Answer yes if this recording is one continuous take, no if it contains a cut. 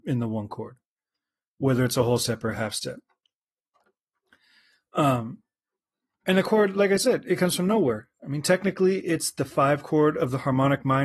yes